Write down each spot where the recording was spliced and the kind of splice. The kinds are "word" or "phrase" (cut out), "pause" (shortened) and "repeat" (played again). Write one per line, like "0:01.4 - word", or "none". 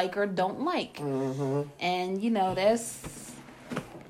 none